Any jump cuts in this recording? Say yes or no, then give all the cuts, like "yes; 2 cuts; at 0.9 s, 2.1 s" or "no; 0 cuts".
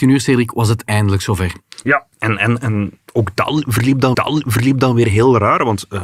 yes; 2 cuts; at 2.1 s, 4.1 s